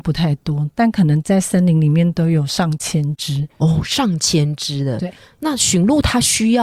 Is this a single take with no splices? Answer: yes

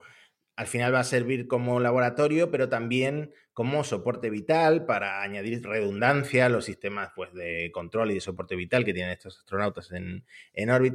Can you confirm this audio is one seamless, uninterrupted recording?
yes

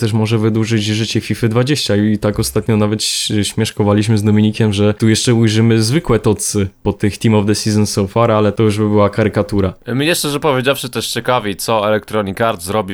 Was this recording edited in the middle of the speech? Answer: no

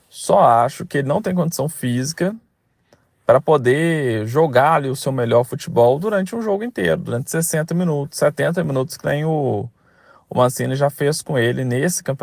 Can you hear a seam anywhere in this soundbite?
no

